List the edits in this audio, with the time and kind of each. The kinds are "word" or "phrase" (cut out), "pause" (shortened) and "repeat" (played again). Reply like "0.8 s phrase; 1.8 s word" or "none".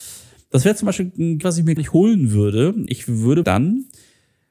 1.4 s word; 1.8 s word; 2.9 s word; 3.4 s word